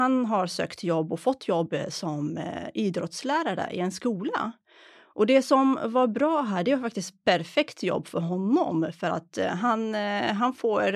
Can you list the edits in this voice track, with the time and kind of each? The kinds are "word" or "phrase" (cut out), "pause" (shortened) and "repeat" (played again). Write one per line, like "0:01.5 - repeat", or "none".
none